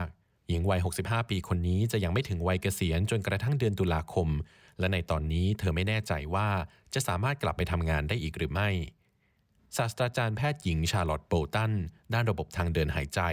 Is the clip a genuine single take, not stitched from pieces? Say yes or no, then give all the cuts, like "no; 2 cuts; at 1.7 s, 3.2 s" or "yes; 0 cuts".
yes; 0 cuts